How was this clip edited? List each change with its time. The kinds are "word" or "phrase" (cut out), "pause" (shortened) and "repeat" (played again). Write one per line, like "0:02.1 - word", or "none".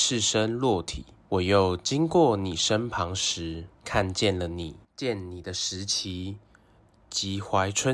0:01.3 - pause
0:03.8 - pause
0:04.8 - pause